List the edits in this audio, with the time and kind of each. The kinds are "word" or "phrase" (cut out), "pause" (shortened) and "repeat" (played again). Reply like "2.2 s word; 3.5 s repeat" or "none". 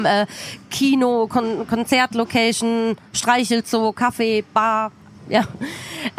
none